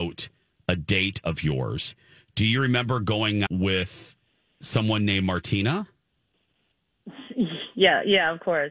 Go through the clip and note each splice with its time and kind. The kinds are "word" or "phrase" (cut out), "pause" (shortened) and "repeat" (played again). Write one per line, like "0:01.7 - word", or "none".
0:03.5 - word